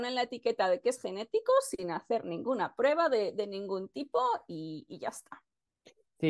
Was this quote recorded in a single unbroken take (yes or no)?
yes